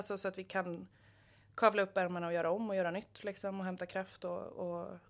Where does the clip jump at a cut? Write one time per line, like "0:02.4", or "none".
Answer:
none